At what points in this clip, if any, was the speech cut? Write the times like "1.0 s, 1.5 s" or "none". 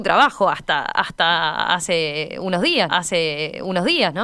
2.9 s